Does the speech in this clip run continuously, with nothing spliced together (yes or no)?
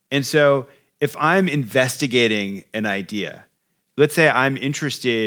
yes